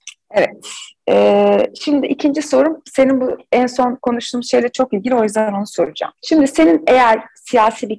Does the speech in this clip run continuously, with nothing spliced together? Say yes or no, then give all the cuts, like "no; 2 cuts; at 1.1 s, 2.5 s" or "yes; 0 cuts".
no; 1 cut; at 6.2 s